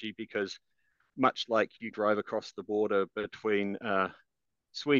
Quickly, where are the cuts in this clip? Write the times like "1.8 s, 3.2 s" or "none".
1.9 s